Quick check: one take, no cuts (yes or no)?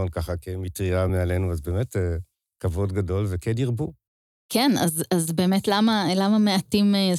yes